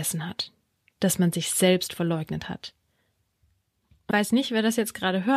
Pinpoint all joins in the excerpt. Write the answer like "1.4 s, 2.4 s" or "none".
4.1 s